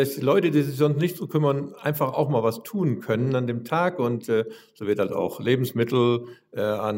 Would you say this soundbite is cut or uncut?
uncut